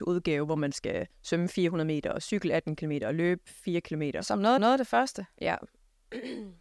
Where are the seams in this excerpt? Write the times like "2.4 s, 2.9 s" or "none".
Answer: 1.1 s, 4.6 s

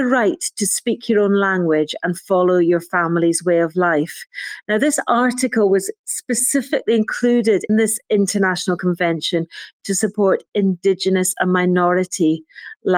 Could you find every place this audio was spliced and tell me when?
7.7 s

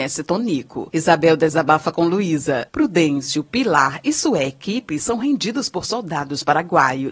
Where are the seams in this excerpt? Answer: none

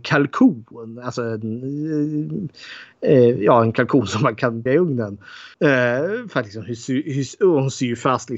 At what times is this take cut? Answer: 4.7 s, 5.5 s

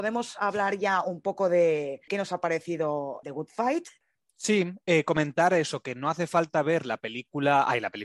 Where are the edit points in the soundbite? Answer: none

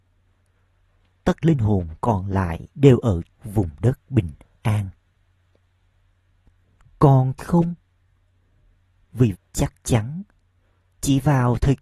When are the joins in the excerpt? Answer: 1.4 s, 2.7 s, 3.3 s, 4.0 s, 7.4 s, 9.3 s

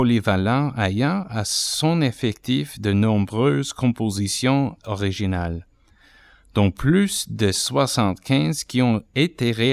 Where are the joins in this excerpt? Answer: none

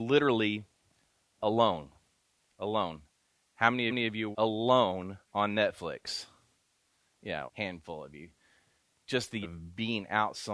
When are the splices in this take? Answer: 2.1 s, 3.9 s, 4.3 s, 5.2 s, 7.5 s, 9.4 s

